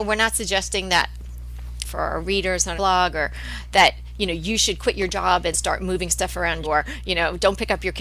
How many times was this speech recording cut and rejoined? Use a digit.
4